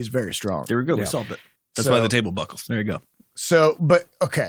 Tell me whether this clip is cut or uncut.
uncut